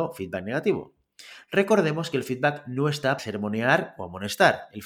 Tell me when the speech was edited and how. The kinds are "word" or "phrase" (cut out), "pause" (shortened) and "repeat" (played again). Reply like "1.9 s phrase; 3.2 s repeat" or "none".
3.2 s word